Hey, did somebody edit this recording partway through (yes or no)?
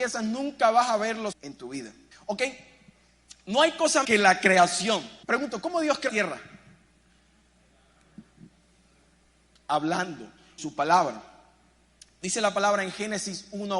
yes